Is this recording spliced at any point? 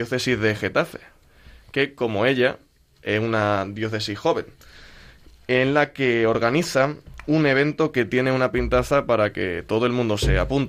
no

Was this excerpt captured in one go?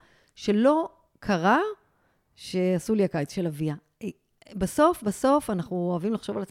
yes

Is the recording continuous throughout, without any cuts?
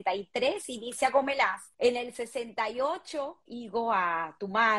no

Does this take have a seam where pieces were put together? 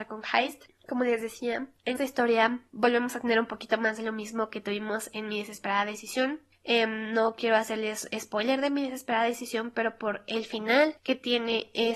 yes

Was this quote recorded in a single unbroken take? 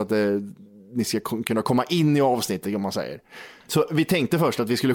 yes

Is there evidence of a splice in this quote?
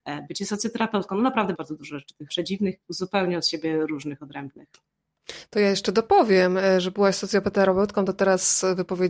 yes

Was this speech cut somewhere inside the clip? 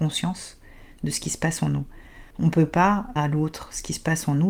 yes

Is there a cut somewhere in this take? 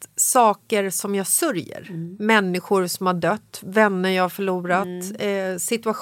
no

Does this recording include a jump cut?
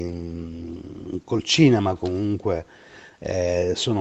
no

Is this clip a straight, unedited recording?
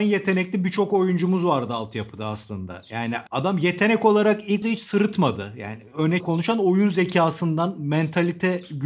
no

